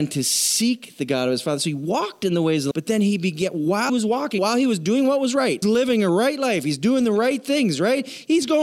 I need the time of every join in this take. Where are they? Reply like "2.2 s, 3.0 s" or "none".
2.7 s, 3.9 s, 4.4 s, 5.6 s